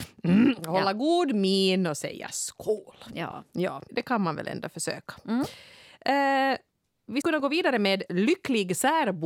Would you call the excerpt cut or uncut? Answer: cut